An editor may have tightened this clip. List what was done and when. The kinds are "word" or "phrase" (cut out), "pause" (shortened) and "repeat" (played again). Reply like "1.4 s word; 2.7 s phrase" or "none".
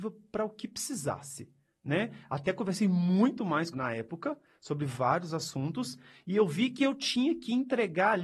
3.7 s phrase